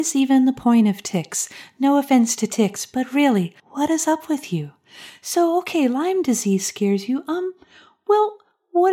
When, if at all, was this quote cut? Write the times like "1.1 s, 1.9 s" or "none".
3.6 s